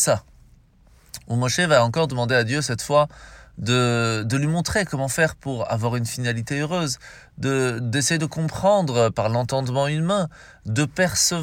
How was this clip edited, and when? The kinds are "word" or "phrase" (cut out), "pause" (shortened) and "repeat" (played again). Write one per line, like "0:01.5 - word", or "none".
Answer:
none